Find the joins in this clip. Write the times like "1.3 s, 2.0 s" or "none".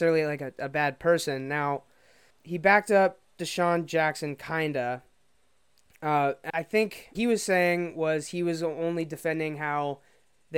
2.3 s, 6.5 s, 7.1 s